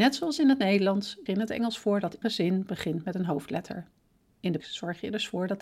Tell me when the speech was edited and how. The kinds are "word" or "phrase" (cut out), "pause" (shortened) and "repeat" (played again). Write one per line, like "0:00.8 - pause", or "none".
0:01.3 - word
0:02.2 - word
0:04.6 - word